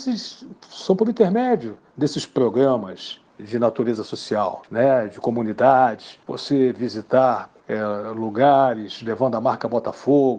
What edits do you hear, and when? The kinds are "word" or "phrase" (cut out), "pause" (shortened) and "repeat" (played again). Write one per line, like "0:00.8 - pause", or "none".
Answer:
0:03.3 - pause
0:04.7 - pause
0:06.2 - pause
0:07.6 - pause